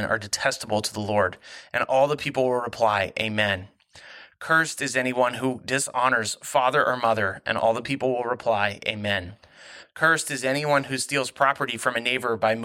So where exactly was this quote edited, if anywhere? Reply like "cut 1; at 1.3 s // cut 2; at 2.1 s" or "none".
none